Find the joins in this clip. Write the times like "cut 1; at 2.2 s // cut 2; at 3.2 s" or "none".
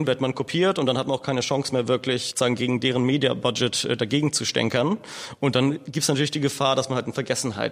cut 1; at 2.3 s